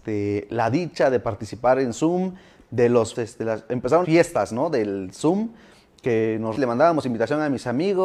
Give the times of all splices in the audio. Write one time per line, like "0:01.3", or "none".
0:03.1
0:04.0
0:06.5